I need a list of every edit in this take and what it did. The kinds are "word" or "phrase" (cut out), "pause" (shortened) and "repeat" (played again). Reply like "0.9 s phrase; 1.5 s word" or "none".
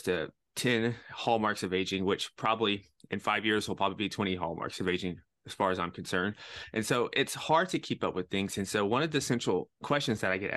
none